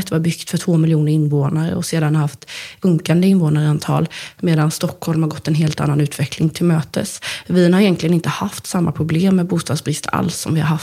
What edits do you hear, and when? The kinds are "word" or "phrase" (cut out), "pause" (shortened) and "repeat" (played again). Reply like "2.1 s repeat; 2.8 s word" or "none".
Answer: none